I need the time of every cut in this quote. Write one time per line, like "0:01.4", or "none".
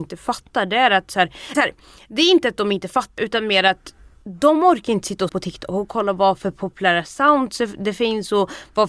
0:01.5
0:03.2
0:05.3